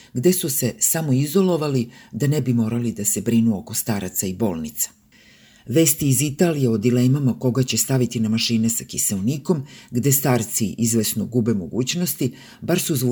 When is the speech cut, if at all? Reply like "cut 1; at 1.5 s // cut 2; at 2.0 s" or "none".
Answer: none